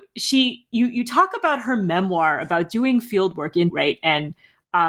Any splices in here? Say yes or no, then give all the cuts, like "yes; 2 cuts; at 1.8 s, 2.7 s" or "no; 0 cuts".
yes; 1 cut; at 3.7 s